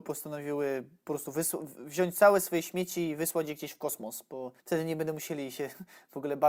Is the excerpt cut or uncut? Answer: cut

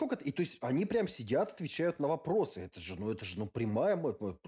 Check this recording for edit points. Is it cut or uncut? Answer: uncut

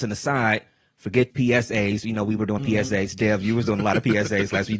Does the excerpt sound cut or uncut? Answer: cut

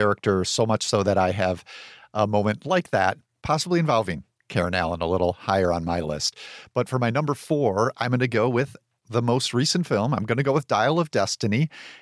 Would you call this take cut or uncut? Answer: uncut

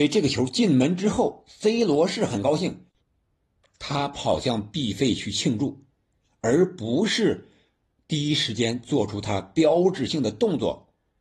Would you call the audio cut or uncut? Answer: uncut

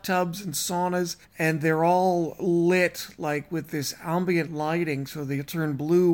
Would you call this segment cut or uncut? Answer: cut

